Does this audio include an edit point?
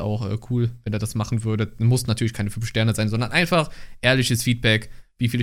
no; 0 cuts

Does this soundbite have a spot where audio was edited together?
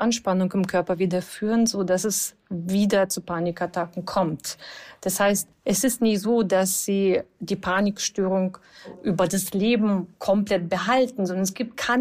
yes; 2 cuts; at 5.5 s, 10.1 s

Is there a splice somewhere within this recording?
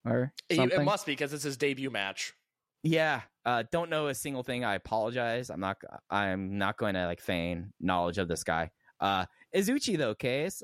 no; 0 cuts

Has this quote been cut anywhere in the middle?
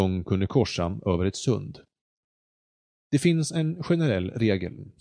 no; 0 cuts

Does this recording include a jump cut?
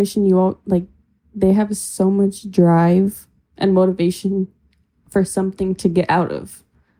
no; 0 cuts

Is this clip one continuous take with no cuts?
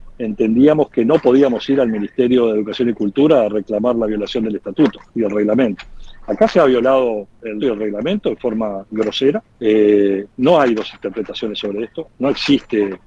no; 3 cuts; at 5.1 s, 7.6 s, 9.5 s

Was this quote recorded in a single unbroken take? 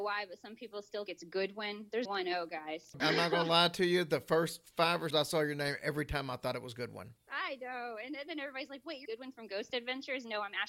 no; 4 cuts; at 1.1 s, 2.0 s, 5.1 s, 9.0 s

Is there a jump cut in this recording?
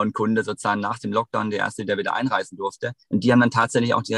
yes; 1 cut; at 3.0 s

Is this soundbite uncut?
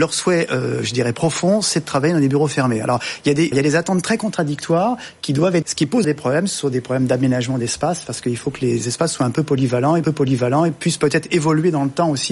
no; 4 cuts; at 3.5 s, 5.6 s, 6.0 s, 10.0 s

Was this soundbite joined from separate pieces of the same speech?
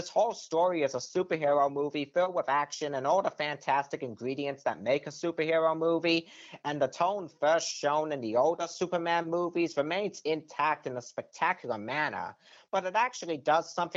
no; 0 cuts

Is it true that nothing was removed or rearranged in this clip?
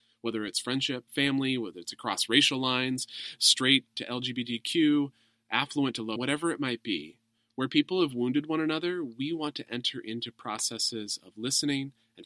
no; 3 cuts; at 1.1 s, 3.9 s, 6.2 s

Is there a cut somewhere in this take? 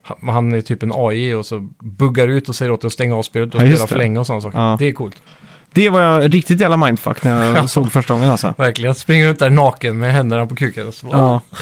no; 0 cuts

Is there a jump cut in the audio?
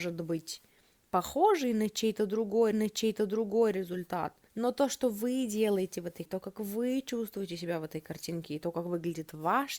yes; 3 cuts; at 2.7 s, 4.5 s, 6.3 s

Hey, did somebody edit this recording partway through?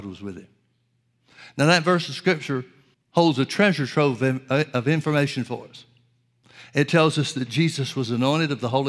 yes; 1 cut; at 2.9 s

